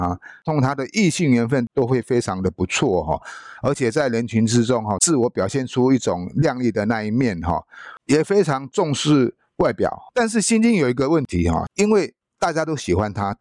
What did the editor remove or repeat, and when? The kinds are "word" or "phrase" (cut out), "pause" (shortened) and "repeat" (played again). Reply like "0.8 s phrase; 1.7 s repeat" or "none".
10.1 s pause; 12.2 s pause

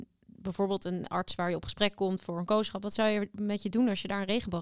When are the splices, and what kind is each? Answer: none

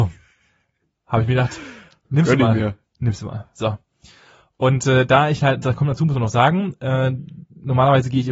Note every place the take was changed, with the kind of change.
none

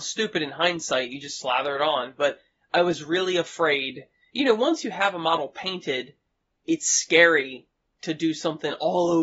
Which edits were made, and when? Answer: none

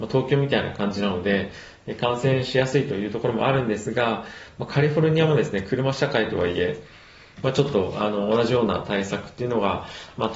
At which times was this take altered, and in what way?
none

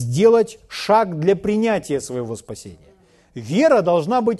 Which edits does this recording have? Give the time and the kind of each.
none

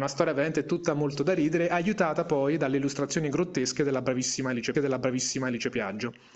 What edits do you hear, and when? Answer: 4.7 s repeat

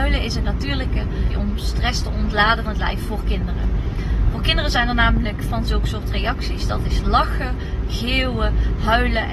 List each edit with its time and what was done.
1.3 s word; 2.7 s word; 5.5 s word

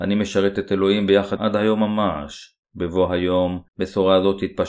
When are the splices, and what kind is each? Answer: 1.4 s word; 2.6 s pause; 3.7 s pause

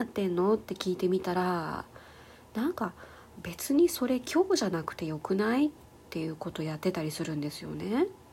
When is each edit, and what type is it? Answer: none

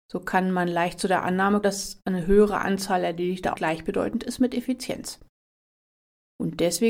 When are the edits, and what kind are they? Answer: 1.6 s word; 3.6 s phrase

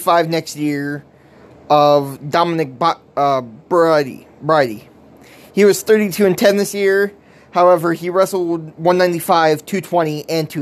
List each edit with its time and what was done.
none

